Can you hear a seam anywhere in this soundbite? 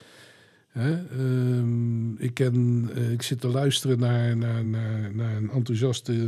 no; 0 cuts

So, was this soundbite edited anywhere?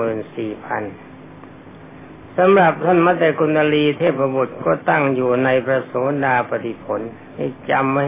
no; 0 cuts

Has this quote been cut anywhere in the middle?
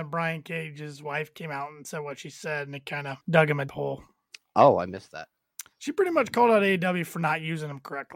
yes; 3 cuts; at 3.2 s, 3.7 s, 5.7 s

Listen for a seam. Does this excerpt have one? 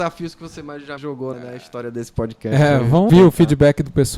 yes; 3 cuts; at 1.0 s, 1.3 s, 3.1 s

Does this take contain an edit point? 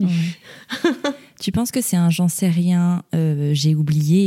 no; 0 cuts

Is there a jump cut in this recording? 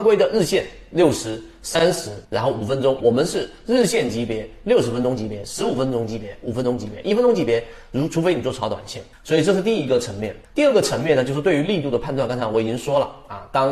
yes; 4 cuts; at 2.2 s, 3.0 s, 9.1 s, 10.4 s

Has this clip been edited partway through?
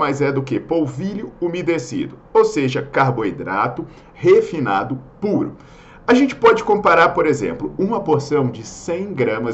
no; 0 cuts

